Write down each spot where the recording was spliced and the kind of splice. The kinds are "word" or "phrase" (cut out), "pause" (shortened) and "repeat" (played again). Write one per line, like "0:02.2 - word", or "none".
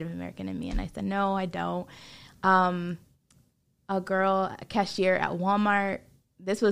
none